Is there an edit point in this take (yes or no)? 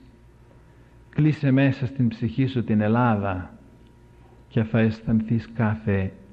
no